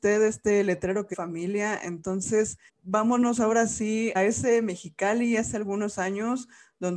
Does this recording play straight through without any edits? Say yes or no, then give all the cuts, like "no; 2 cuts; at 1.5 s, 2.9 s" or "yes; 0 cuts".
no; 3 cuts; at 1.1 s, 2.7 s, 4.1 s